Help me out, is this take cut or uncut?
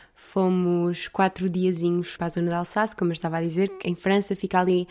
cut